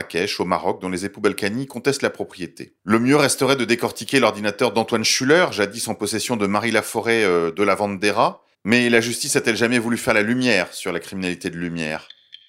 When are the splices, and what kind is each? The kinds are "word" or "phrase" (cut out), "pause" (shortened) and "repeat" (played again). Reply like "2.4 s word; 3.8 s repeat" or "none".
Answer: 2.8 s pause; 8.5 s pause

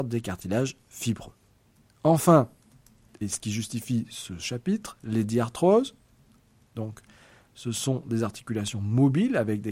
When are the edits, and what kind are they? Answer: none

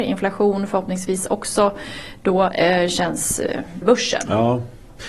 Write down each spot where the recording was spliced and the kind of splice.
3.8 s phrase

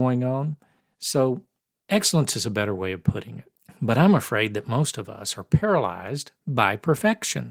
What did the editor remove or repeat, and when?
none

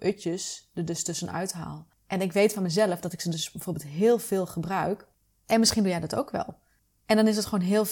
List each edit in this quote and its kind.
none

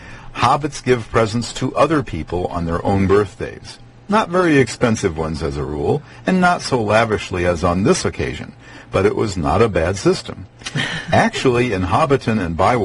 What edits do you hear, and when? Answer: none

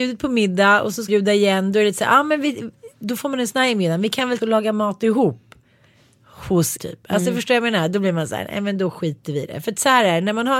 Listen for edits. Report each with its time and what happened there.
1.1 s word; 4.4 s word; 6.8 s word

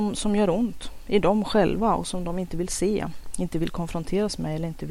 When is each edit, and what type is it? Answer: none

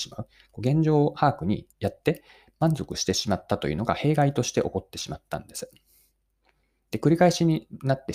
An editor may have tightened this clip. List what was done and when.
1.7 s pause

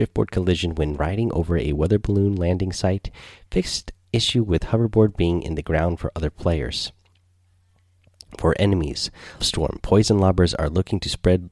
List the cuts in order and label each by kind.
9.4 s word

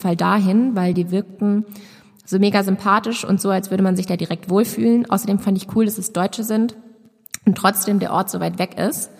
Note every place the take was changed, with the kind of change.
none

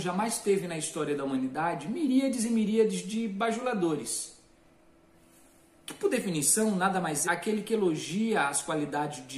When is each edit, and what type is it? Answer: 7.2 s phrase

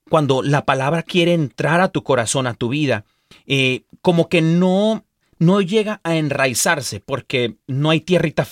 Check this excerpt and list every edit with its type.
none

